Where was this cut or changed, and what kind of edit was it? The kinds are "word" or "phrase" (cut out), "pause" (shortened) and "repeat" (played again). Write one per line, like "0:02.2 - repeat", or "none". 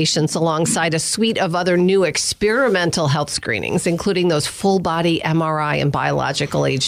none